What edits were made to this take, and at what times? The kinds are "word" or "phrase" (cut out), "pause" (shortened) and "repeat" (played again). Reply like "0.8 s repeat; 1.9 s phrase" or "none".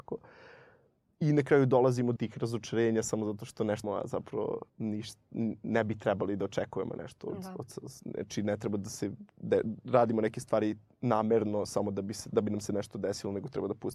2.2 s word; 3.8 s word; 4.7 s pause